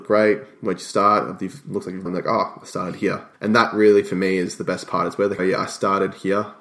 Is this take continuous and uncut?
no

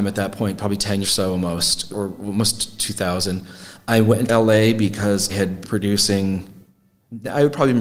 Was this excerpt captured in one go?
no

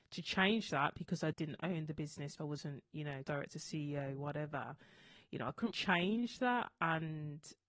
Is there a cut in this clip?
yes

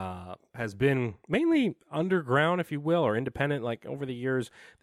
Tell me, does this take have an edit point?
no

